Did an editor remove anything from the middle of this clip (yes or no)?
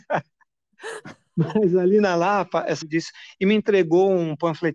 yes